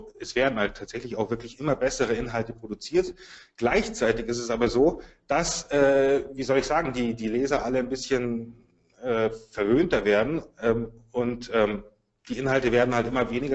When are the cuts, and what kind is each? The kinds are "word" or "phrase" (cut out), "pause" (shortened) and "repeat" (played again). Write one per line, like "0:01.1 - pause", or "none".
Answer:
none